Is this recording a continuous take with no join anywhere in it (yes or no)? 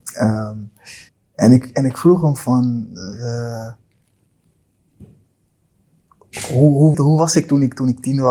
no